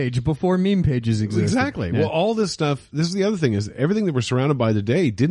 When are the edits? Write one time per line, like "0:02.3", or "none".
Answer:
none